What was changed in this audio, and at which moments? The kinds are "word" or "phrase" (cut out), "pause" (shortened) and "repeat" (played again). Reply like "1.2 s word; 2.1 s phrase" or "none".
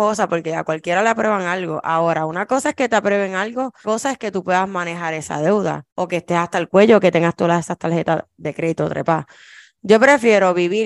3.8 s word; 5.9 s pause